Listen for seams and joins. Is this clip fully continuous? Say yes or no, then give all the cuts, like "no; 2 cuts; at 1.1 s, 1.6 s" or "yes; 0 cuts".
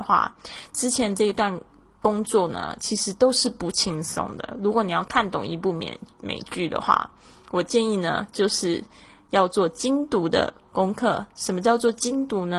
yes; 0 cuts